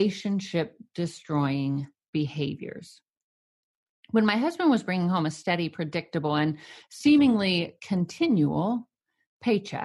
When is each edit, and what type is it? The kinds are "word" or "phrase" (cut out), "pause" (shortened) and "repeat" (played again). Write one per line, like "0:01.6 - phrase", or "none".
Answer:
none